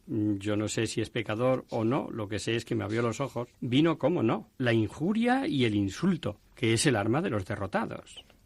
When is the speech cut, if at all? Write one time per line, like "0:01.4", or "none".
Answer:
0:03.5
0:04.5
0:06.5